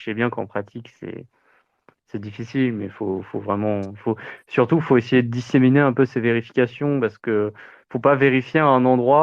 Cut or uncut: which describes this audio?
uncut